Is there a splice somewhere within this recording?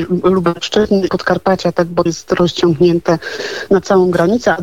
yes; 2 cuts; at 1.1 s, 2.1 s

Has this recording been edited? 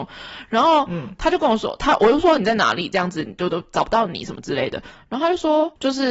yes; 1 cut; at 2.4 s

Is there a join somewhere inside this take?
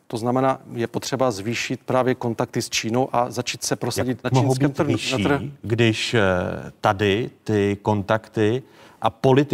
yes; 1 cut; at 4.2 s

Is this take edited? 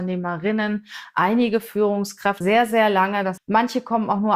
yes; 2 cuts; at 2.4 s, 3.4 s

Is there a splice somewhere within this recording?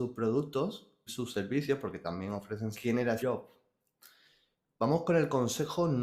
yes; 3 cuts; at 1.1 s, 2.7 s, 3.2 s

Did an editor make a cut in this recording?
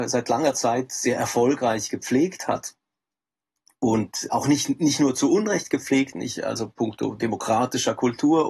yes; 2 cuts; at 4.3 s, 6.1 s

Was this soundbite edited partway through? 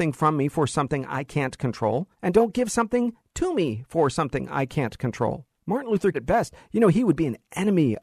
yes; 3 cuts; at 2.1 s, 5.6 s, 6.1 s

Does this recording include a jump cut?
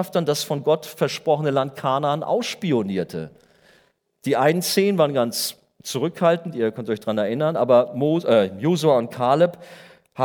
no; 0 cuts

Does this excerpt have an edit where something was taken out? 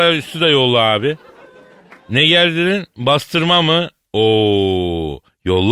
no; 0 cuts

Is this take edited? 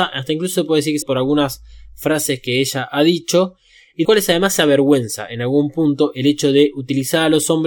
yes; 2 cuts; at 1.0 s, 4.0 s

